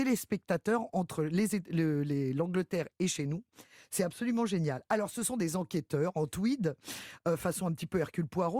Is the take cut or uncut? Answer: uncut